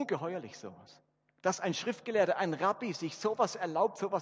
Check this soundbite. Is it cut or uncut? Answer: uncut